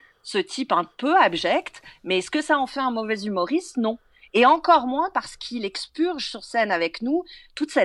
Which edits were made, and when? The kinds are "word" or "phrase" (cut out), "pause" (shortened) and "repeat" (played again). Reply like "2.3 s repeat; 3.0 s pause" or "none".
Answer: none